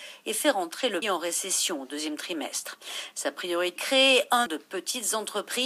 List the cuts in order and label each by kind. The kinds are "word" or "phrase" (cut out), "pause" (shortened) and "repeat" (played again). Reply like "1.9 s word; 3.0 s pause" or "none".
1.0 s word; 3.8 s word; 4.5 s word